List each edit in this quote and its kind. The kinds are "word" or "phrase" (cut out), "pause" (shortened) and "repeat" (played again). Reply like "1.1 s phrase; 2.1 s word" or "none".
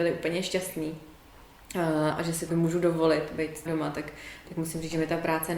2.1 s word; 2.5 s word; 3.7 s word